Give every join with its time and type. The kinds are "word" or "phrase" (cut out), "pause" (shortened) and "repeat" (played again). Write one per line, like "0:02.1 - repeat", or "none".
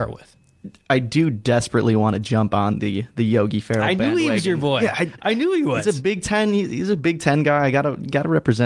none